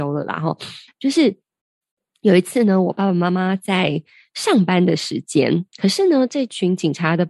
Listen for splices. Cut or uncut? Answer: cut